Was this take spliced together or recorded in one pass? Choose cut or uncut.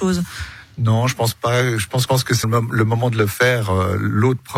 cut